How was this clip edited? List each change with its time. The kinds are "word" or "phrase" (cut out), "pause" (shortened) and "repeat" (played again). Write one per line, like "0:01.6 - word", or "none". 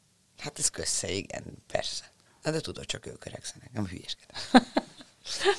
0:02.3 - pause